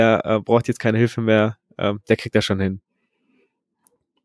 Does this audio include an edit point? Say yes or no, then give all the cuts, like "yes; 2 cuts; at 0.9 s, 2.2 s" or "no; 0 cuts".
no; 0 cuts